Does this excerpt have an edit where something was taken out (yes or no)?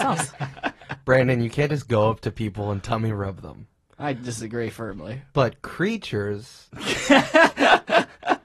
no